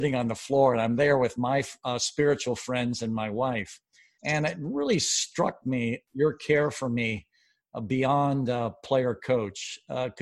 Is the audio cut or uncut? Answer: uncut